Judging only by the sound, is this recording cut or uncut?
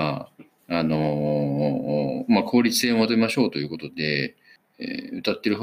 uncut